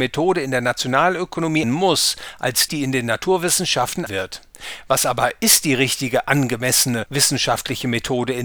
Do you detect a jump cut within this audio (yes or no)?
yes